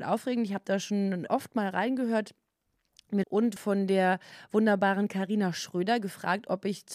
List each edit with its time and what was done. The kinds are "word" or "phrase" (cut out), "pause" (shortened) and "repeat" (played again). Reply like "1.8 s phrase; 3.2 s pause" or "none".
1.3 s word; 3.2 s phrase; 3.6 s word